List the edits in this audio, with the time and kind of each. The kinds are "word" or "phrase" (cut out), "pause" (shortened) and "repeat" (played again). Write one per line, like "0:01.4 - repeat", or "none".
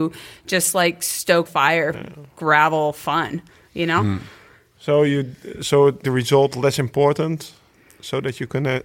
0:01.5 - word
0:01.9 - word
0:06.0 - phrase

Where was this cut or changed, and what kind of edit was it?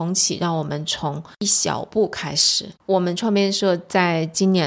0:02.8 - pause

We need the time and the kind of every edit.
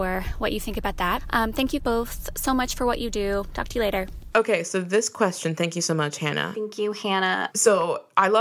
0:01.8 - word

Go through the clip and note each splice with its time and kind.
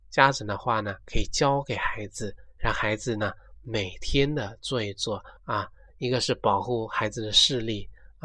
0:05.4 - pause

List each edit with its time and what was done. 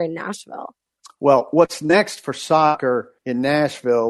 0:03.2 - pause

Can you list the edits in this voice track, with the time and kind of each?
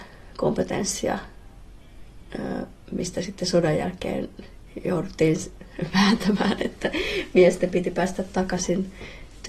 none

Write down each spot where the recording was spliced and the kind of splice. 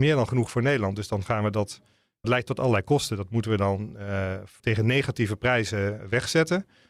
0:02.2 - word
0:04.6 - word

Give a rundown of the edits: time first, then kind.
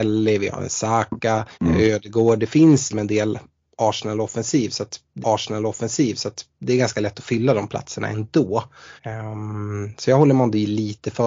0:01.5 - pause
0:02.9 - word
0:05.2 - repeat
0:09.0 - pause

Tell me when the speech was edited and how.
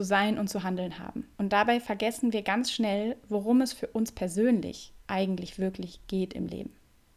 0:01.3 - pause
0:05.0 - pause

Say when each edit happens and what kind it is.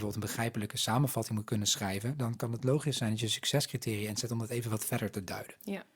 none

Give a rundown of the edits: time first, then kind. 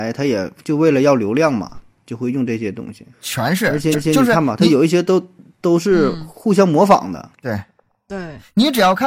0:03.1 - pause
0:03.9 - repeat
0:07.3 - pause

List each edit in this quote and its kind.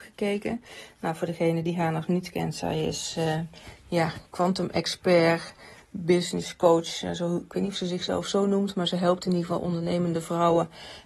none

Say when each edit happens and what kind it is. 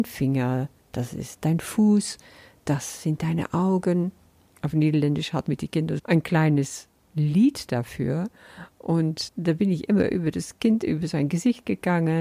0:05.4 - word
0:06.0 - word
0:07.1 - word
0:09.3 - word

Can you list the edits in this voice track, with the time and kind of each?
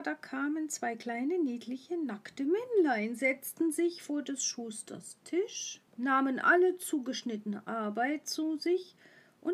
0:05.9 - pause

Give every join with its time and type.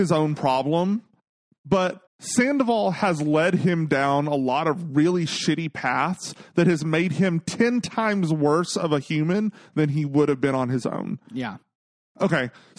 0:02.1 - pause

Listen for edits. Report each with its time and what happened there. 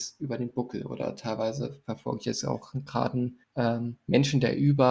0:03.4 - pause

